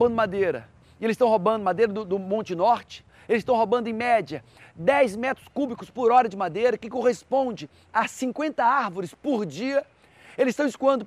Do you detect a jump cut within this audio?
no; 0 cuts

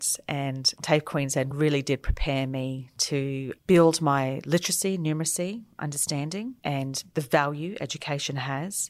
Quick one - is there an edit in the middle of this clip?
no; 0 cuts

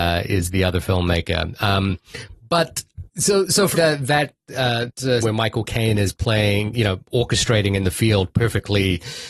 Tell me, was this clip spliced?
yes; 4 cuts; at 3.1 s, 3.7 s, 4.9 s, 5.2 s

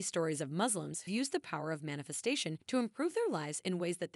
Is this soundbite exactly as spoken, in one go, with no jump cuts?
no; 2 cuts; at 1.1 s, 2.6 s

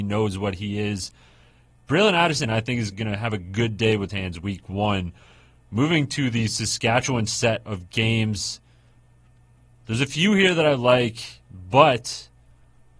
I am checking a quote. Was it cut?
yes; 2 cuts; at 2.9 s, 4.1 s

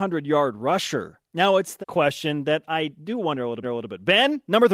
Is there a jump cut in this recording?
yes; 3 cuts; at 1.3 s, 1.8 s, 3.6 s

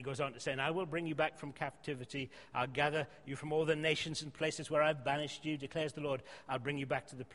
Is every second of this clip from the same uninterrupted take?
yes; 0 cuts

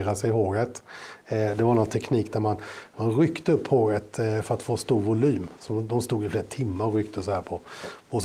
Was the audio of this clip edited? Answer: no; 0 cuts

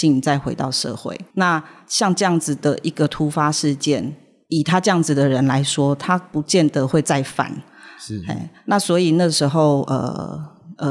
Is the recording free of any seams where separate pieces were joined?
yes; 0 cuts

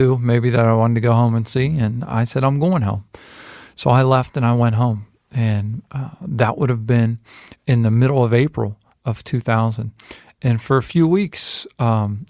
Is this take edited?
no; 0 cuts

